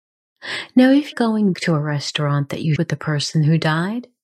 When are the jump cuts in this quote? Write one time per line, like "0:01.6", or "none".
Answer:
0:01.1
0:01.5
0:02.8